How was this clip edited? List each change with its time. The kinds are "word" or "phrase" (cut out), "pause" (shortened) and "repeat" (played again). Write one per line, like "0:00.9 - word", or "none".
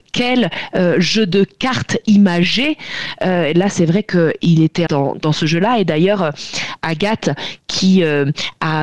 0:04.9 - word
0:05.2 - word